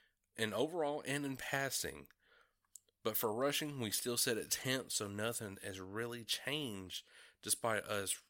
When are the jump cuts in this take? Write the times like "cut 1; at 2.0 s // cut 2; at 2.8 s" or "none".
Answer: none